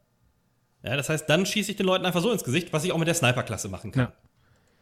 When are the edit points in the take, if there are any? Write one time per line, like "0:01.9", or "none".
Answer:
none